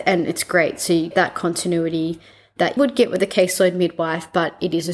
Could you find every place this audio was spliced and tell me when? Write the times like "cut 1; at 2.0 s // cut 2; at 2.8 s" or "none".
cut 1; at 1.1 s // cut 2; at 2.8 s